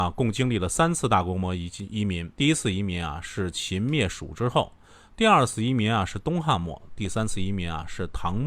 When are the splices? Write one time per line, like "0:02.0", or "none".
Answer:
0:02.3